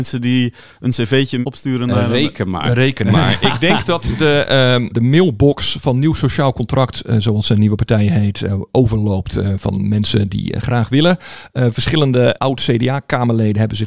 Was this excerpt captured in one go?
yes; 0 cuts

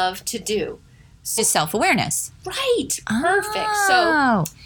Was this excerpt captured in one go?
no; 1 cut; at 1.4 s

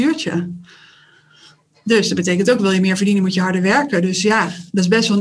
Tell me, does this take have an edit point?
no; 0 cuts

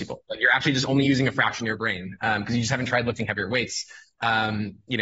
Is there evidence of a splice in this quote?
no; 0 cuts

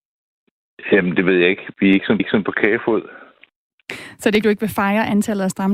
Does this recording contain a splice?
yes; 2 cuts; at 2.2 s, 4.4 s

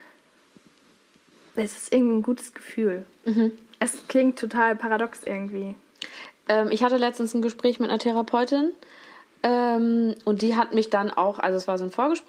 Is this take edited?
no; 0 cuts

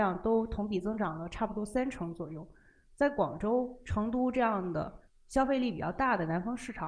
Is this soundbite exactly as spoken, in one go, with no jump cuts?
yes; 0 cuts

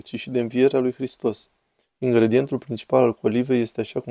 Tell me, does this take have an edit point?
no; 0 cuts

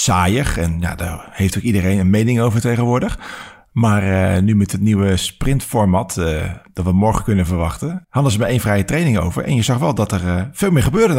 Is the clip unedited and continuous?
yes; 0 cuts

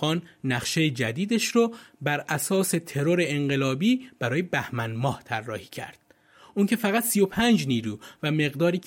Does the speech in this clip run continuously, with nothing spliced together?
yes; 0 cuts

